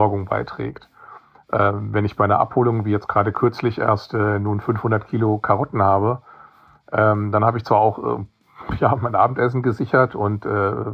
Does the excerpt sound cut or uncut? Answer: uncut